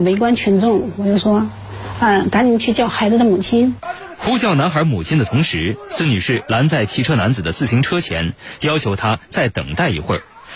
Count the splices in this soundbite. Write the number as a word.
zero